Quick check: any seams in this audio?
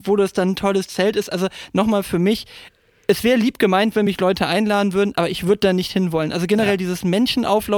no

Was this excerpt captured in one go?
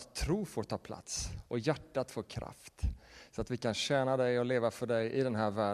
yes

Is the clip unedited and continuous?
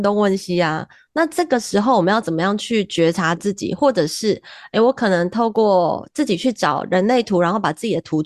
yes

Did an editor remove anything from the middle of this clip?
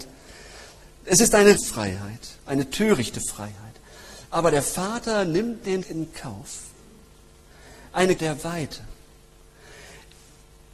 yes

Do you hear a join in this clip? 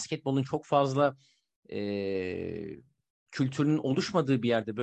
no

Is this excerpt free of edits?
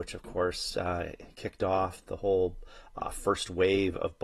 yes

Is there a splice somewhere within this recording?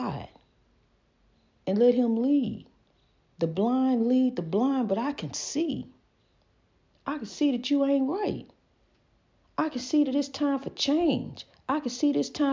no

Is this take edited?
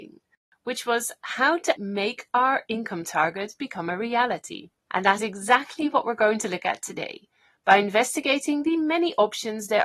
yes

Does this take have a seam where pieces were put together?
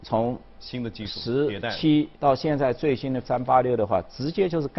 yes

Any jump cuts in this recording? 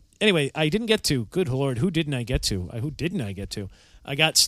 no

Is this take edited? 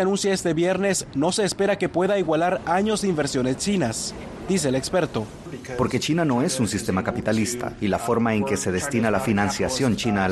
no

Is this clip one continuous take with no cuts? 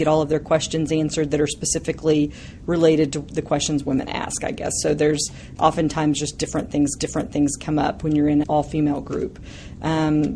no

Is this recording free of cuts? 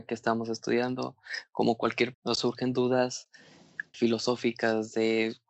no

